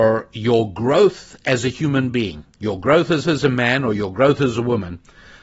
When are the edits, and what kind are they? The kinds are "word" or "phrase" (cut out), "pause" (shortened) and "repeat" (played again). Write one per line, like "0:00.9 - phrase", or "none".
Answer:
0:02.5 - pause
0:03.2 - repeat